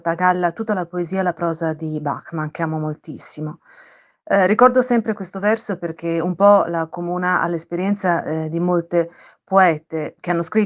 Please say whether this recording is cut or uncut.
uncut